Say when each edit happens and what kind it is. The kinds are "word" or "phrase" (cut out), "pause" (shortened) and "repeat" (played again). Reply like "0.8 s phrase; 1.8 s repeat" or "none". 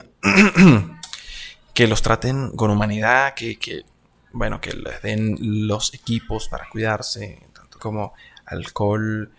7.8 s word